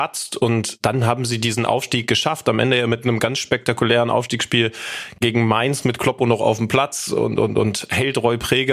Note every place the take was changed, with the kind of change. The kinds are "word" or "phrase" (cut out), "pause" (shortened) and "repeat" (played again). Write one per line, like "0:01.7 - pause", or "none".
none

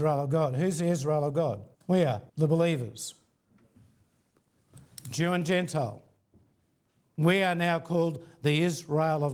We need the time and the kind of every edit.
0:01.7 - pause
0:02.3 - pause

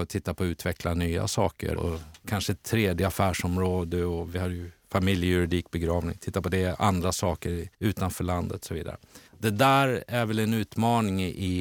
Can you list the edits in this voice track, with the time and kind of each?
0:01.8 - word
0:07.7 - pause
0:09.3 - pause

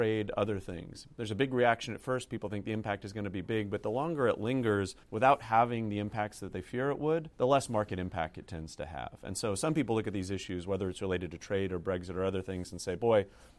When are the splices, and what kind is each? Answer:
0:05.0 - pause
0:07.3 - pause

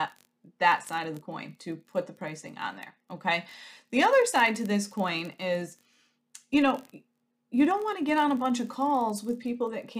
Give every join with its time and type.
none

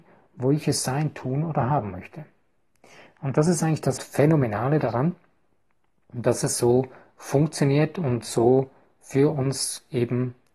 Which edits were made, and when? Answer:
0:04.0 - word

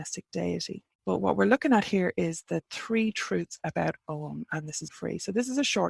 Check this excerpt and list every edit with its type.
0:00.9 - pause
0:04.9 - word

